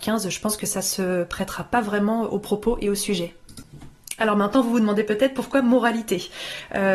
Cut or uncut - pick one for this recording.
uncut